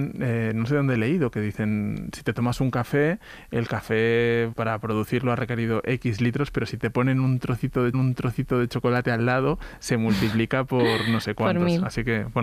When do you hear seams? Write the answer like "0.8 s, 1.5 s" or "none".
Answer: 4.5 s, 7.9 s